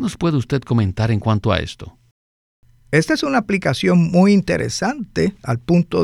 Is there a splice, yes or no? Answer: no